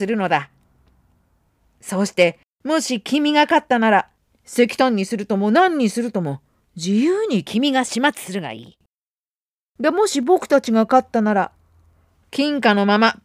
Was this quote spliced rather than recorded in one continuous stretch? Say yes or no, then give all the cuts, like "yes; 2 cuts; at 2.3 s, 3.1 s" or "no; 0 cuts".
no; 0 cuts